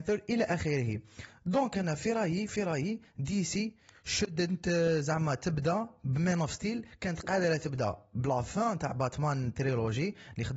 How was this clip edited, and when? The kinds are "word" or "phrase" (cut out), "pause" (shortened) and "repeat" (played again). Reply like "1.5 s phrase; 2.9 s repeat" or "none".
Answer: none